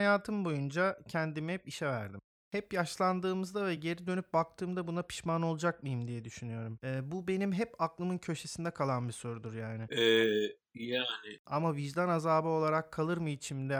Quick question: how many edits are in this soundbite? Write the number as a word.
zero